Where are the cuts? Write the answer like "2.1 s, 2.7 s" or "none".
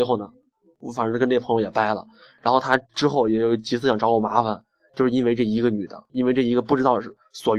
2.8 s